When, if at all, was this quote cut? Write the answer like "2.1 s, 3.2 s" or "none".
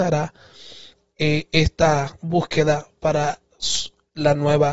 none